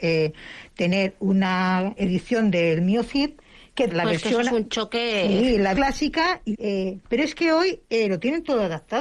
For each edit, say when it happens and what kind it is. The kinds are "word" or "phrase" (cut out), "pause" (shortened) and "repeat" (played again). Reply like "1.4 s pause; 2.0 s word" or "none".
2.0 s word; 3.9 s word; 5.7 s word; 6.5 s word; 7.0 s word